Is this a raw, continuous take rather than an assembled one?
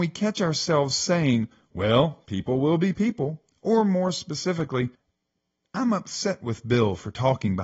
yes; 0 cuts

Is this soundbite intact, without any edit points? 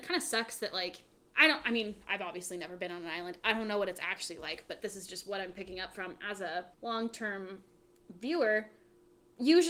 no; 1 cut; at 6.7 s

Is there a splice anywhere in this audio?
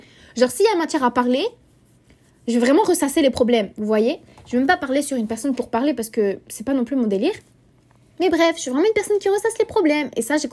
no; 0 cuts

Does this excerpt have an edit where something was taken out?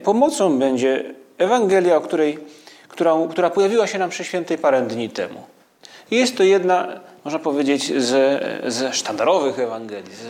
no; 0 cuts

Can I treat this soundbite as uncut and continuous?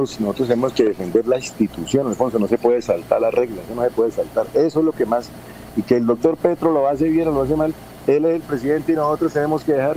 yes; 0 cuts

